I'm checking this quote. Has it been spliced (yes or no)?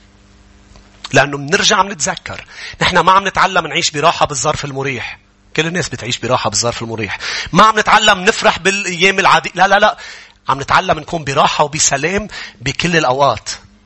no